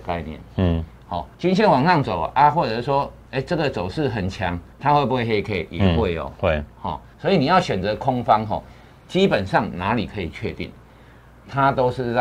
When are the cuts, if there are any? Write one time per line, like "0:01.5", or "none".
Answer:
0:01.3
0:04.7
0:07.1